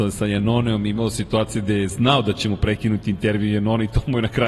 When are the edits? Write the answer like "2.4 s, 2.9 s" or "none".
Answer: none